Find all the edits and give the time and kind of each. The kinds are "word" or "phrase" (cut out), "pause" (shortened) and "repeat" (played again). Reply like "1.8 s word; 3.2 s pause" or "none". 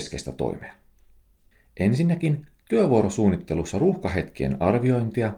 none

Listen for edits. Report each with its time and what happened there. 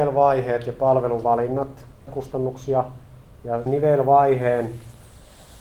2.1 s word; 3.7 s word

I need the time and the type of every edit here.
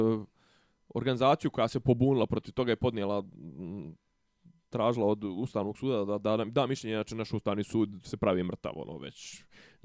none

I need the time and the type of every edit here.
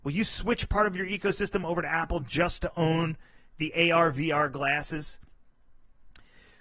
none

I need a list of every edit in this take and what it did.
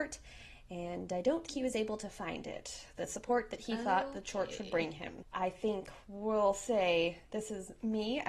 1.5 s word; 5.2 s word

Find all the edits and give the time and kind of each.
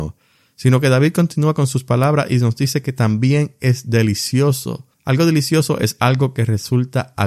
4.9 s pause

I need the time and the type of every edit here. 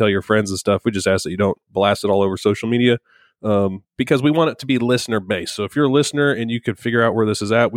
none

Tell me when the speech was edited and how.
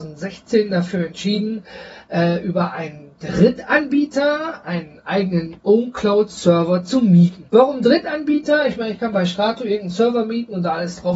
7.5 s pause

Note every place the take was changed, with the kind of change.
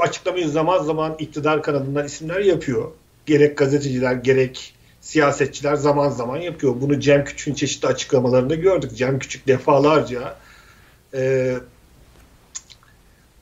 none

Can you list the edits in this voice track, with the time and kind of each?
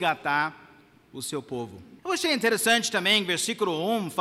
2.0 s pause

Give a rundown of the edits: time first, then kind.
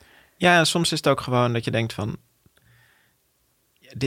none

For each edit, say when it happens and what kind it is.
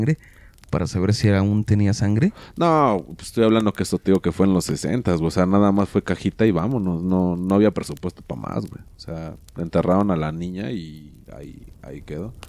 none

